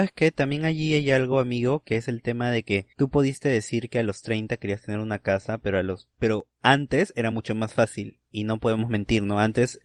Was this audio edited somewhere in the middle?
no; 0 cuts

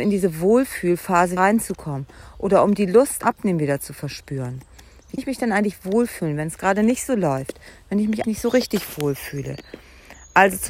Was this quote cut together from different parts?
yes; 4 cuts; at 1.4 s, 3.2 s, 5.2 s, 8.2 s

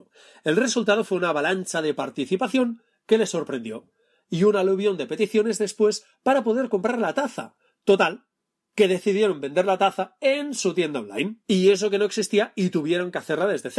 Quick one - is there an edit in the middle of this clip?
no; 0 cuts

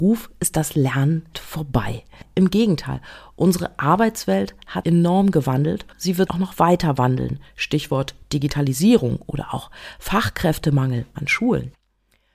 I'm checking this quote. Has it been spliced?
yes; 5 cuts; at 1.3 s, 4.8 s, 5.9 s, 6.3 s, 11.1 s

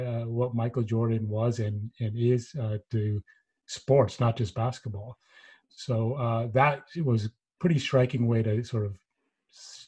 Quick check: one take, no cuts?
yes; 0 cuts

